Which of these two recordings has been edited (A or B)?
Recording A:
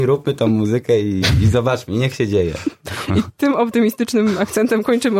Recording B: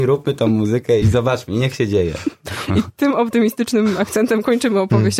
B